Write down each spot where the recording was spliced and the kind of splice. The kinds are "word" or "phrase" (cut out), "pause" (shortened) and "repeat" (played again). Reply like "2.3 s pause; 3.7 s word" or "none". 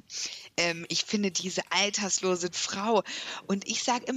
2.5 s word